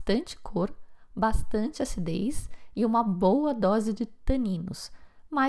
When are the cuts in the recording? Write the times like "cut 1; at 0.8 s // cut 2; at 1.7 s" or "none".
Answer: none